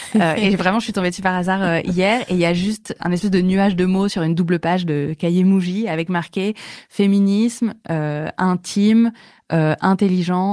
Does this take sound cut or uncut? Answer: uncut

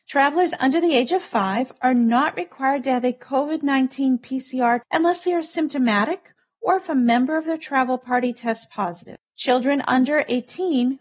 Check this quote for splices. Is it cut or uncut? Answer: cut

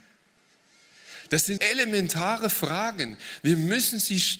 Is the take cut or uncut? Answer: cut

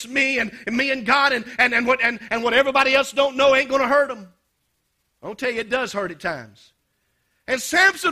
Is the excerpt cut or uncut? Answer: cut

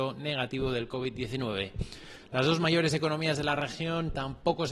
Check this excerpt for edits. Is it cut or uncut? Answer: uncut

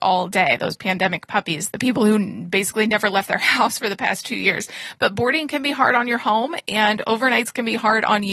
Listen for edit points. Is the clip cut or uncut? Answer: cut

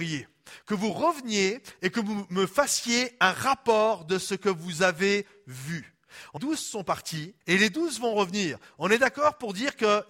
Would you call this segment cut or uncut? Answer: cut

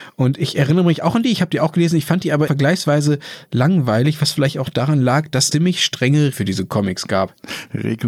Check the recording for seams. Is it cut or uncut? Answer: cut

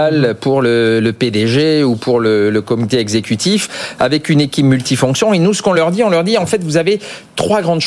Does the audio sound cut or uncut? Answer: uncut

